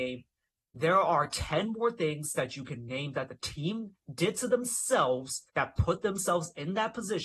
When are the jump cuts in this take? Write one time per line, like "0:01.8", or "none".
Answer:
0:05.5